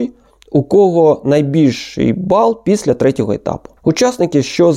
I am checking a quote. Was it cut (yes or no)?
yes